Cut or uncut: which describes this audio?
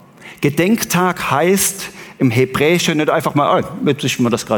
uncut